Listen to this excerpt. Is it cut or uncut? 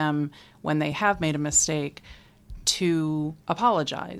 uncut